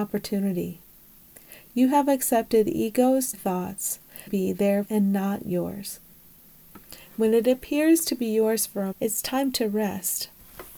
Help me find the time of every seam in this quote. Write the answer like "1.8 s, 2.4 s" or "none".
3.3 s, 4.3 s, 4.8 s, 8.9 s